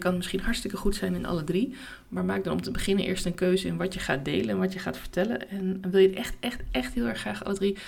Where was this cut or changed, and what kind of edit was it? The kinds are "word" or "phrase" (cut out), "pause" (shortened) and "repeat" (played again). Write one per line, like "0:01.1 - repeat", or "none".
none